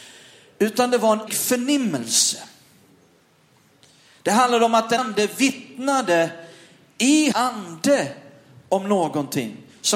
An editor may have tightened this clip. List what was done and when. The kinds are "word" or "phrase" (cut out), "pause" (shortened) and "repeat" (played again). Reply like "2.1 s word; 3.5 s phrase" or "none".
1.3 s word; 5.0 s word; 7.3 s word